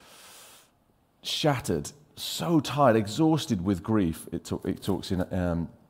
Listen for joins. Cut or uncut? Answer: uncut